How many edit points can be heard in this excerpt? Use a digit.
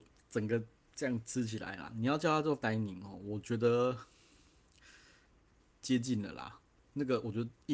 1